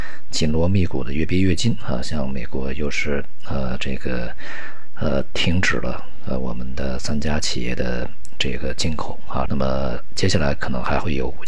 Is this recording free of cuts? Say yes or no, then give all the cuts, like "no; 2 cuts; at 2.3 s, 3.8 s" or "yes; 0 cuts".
no; 1 cut; at 9.5 s